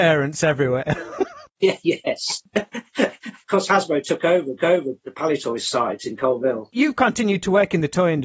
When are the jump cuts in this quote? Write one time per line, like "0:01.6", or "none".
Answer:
0:04.6